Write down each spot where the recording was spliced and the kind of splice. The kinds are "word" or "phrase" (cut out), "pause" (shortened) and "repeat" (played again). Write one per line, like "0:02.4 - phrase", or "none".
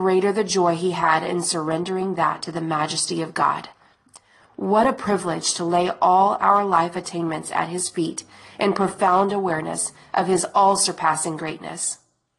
none

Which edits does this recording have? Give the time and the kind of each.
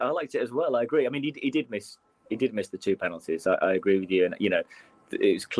none

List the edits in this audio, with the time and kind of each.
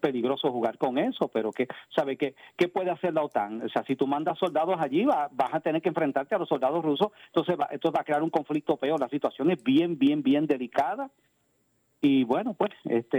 none

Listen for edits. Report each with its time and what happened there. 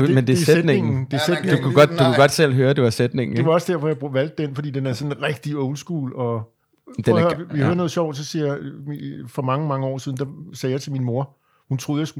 none

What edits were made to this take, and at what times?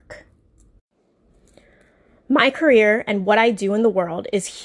none

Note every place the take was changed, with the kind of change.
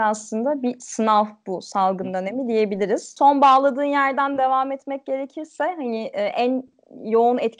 none

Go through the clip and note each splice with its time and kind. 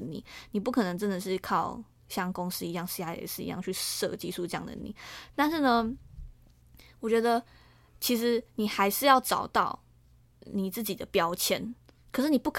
none

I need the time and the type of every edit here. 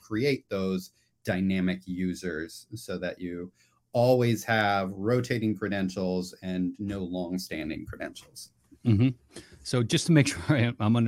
none

